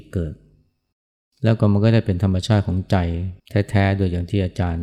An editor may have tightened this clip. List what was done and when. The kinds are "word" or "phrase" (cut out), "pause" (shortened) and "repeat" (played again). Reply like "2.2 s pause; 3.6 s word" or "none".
3.4 s pause